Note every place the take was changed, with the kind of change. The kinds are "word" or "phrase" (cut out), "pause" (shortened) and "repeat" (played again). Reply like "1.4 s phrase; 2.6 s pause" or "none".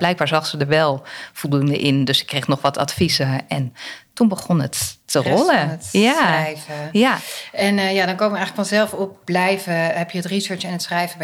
5.0 s pause; 9.3 s phrase